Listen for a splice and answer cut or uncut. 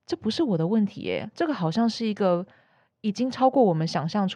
uncut